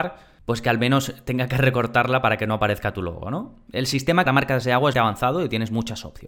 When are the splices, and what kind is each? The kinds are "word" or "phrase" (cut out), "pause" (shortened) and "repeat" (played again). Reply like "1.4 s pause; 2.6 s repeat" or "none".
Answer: 4.3 s phrase; 4.9 s word